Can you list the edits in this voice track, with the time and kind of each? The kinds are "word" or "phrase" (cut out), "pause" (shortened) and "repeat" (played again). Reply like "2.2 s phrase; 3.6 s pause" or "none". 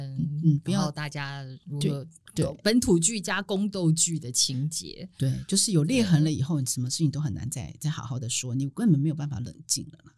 none

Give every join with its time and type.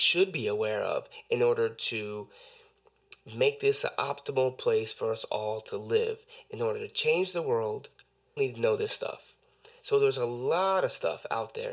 8.4 s word

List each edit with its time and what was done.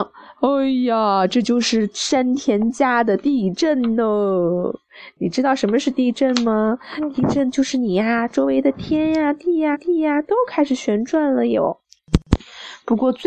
9.7 s repeat

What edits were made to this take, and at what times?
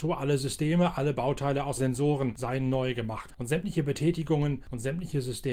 1.8 s phrase; 3.3 s word

